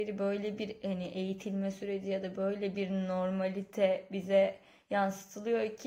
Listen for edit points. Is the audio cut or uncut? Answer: uncut